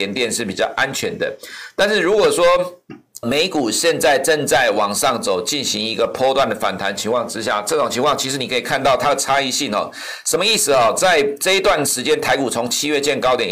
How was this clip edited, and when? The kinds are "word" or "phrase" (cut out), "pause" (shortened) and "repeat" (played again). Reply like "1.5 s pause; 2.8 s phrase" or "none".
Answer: 3.2 s word